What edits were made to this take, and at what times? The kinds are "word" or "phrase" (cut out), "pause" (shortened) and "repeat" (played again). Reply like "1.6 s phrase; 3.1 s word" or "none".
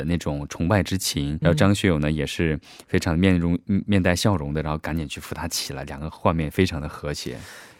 1.4 s word